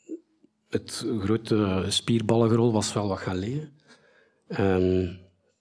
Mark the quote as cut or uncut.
uncut